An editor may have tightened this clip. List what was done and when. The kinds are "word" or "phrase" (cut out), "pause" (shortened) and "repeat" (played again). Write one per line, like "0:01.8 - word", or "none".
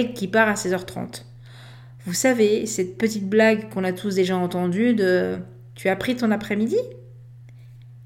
none